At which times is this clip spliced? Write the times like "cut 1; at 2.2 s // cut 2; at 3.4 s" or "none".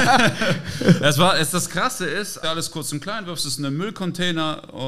cut 1; at 2.4 s